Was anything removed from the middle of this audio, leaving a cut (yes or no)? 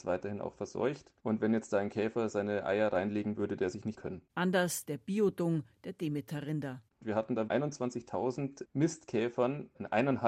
yes